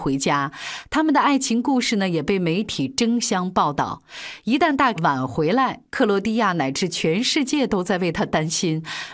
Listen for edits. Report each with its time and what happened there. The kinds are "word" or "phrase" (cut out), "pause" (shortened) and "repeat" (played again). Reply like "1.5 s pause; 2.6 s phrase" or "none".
5.0 s word

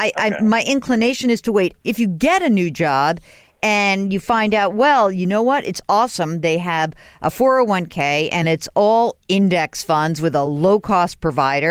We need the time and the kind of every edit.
none

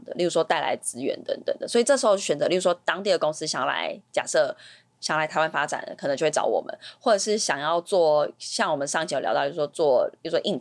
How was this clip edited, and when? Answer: none

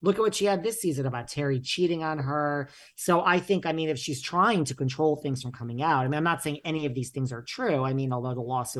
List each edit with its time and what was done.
none

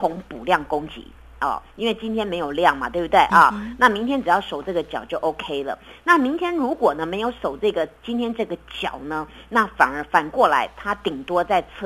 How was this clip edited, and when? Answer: none

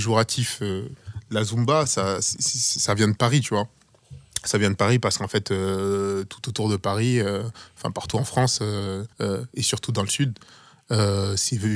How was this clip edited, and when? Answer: 9.1 s pause

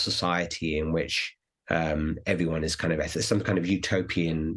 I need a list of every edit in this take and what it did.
none

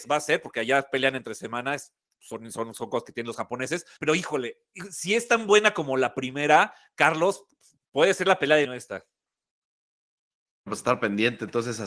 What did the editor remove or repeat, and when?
4.0 s word; 8.6 s word

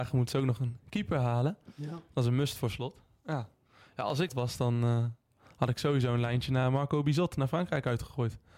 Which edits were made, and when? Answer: 4.3 s word

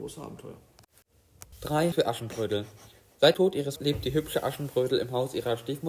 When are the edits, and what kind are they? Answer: 1.9 s word; 3.3 s word; 3.8 s word

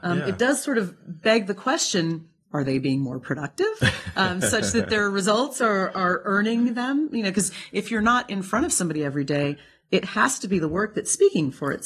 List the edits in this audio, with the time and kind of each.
none

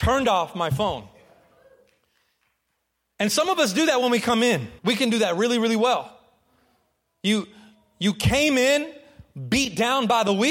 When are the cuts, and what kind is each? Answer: 4.8 s pause

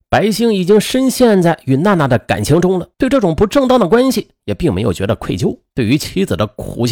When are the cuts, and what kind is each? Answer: 2.9 s pause; 5.7 s pause

